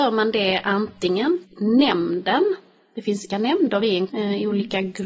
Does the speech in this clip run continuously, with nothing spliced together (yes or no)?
no